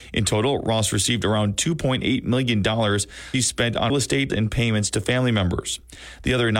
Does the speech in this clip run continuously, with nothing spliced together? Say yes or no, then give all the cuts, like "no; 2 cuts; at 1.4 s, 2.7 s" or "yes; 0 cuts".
no; 3 cuts; at 3.3 s, 3.9 s, 4.3 s